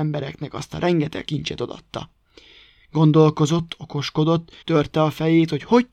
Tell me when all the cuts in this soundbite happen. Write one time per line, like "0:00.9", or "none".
0:01.2
0:04.6